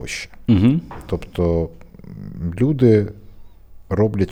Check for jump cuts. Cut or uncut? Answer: uncut